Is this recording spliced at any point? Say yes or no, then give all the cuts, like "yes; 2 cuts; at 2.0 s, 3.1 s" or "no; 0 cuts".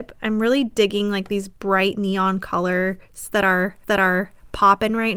yes; 1 cut; at 3.8 s